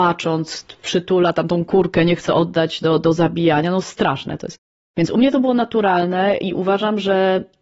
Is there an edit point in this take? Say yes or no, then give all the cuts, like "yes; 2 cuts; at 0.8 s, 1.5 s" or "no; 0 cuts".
no; 0 cuts